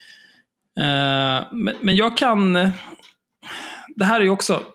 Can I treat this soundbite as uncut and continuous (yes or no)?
yes